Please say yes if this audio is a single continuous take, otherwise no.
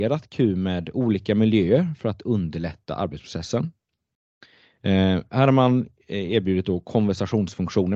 yes